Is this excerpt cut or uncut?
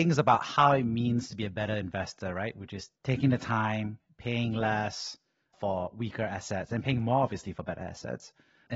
uncut